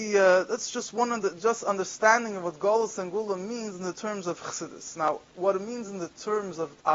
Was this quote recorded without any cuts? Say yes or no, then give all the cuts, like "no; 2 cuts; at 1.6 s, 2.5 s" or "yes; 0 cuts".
yes; 0 cuts